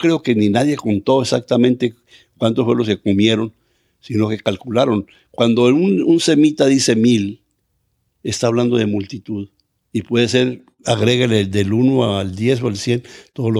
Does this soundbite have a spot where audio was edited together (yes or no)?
no